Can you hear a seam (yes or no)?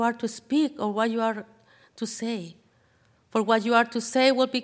no